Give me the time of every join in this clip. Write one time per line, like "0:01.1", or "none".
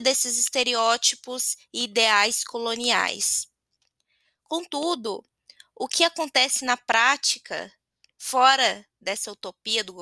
none